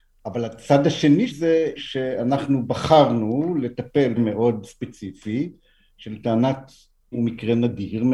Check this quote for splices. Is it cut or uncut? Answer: cut